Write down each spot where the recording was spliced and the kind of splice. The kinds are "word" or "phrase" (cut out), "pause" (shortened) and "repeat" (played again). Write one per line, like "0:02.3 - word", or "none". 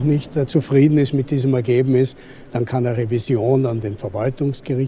none